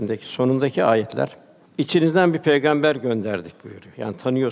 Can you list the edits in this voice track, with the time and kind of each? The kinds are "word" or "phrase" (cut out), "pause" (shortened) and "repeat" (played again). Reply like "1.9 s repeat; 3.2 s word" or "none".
1.7 s pause

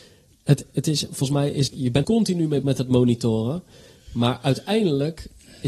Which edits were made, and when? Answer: 1.7 s word; 2.0 s word; 2.6 s word

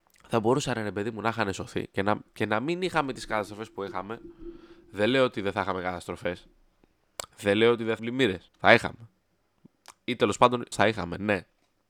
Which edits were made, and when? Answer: 2.3 s pause; 8.0 s word; 8.5 s pause; 10.7 s word

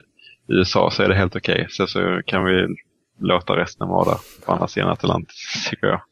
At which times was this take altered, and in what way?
none

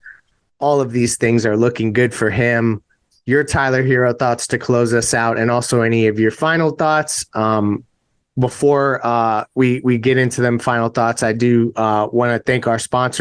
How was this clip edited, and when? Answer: none

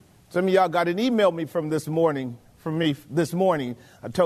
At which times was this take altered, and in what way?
none

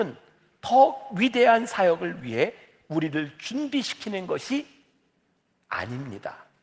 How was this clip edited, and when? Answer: none

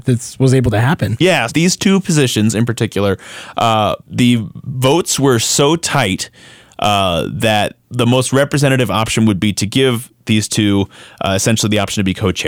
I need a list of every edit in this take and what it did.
1.5 s word; 4.0 s pause; 7.8 s pause

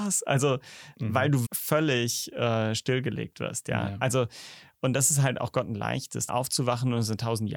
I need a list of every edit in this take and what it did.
1.4 s word; 6.3 s phrase

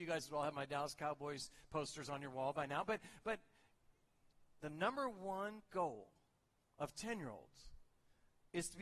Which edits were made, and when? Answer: none

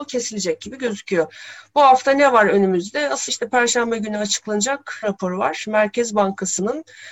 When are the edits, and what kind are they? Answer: 3.3 s word; 5.0 s phrase

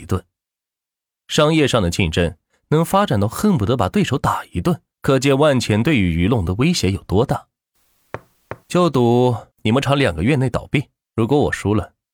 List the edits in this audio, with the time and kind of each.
4.9 s pause; 8.6 s pause; 9.5 s pause; 11.0 s pause

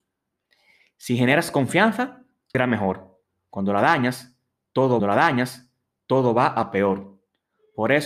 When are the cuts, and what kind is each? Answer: 2.5 s word; 5.0 s repeat

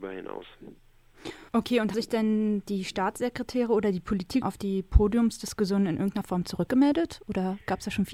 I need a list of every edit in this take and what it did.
1.5 s pause; 1.9 s word; 4.4 s word

